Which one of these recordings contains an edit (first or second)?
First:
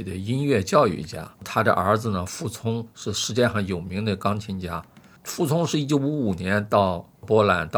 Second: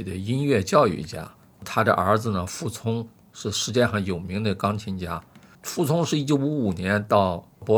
first